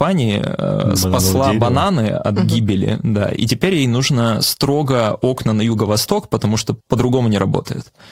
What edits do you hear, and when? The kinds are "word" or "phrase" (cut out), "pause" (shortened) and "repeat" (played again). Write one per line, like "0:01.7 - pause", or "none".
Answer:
0:06.8 - pause